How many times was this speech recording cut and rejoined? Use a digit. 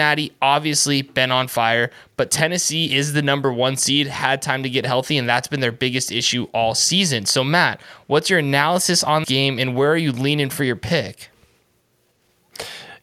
1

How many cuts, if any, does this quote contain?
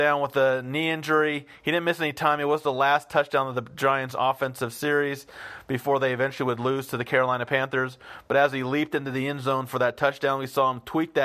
0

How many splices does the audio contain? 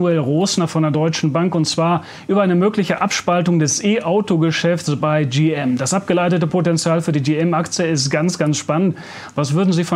0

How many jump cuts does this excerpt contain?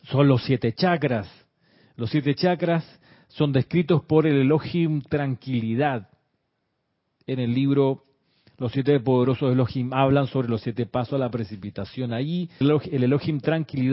1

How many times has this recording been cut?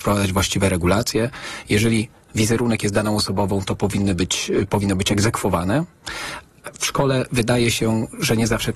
0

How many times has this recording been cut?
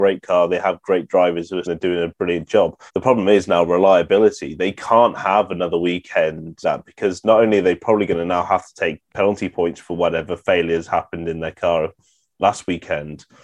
4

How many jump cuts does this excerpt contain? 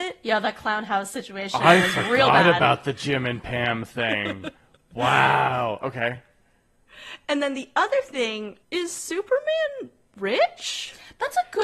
2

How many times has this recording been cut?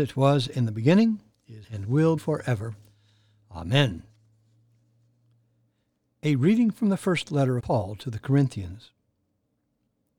3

